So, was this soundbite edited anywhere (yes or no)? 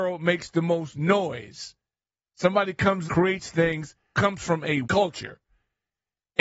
yes